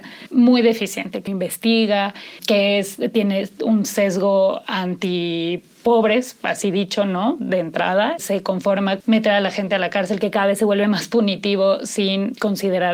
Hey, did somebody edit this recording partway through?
yes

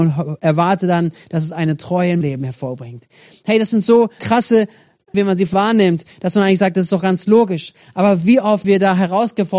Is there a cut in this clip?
yes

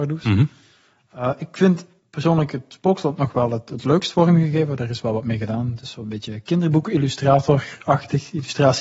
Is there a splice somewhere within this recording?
no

